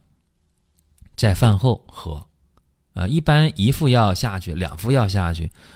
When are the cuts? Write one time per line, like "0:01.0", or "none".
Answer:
none